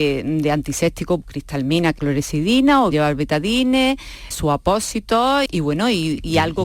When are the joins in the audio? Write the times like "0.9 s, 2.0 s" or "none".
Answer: 1.2 s, 2.0 s, 2.9 s, 4.3 s, 5.5 s